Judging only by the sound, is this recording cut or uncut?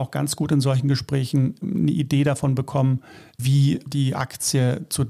uncut